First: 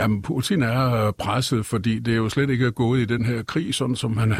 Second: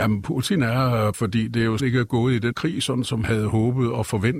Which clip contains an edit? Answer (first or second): second